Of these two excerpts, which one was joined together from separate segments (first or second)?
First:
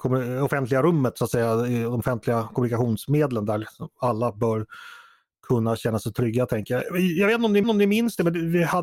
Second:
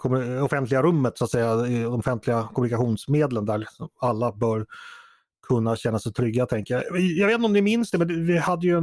first